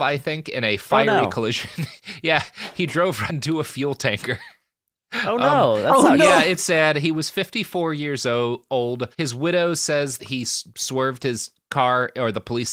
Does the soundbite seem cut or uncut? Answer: cut